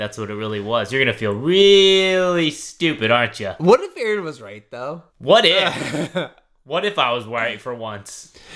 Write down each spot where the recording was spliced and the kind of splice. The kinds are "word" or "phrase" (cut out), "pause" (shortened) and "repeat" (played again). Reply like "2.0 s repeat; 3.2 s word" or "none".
5.1 s pause